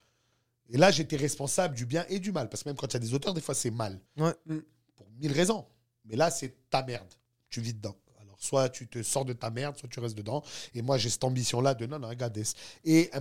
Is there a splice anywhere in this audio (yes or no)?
yes